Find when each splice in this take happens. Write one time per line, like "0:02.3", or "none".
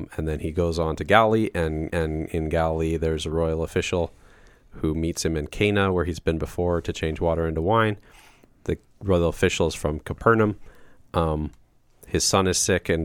0:01.9